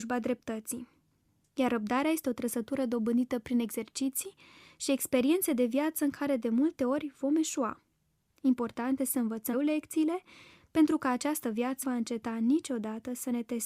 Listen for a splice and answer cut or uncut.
cut